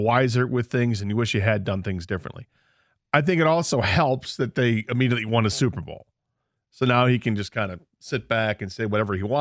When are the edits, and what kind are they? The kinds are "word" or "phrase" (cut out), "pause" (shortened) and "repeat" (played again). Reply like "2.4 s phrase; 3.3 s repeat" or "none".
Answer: none